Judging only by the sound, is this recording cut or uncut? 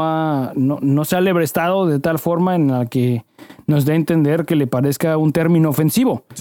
uncut